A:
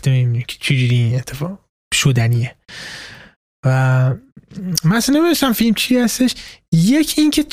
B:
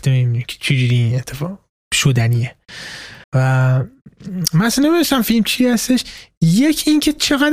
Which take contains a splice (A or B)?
B